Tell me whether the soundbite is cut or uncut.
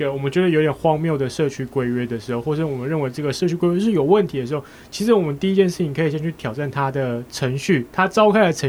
uncut